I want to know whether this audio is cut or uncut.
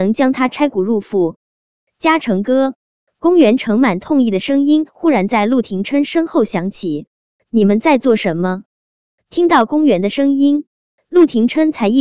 uncut